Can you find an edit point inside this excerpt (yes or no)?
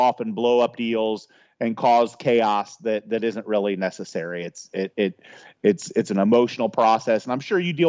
no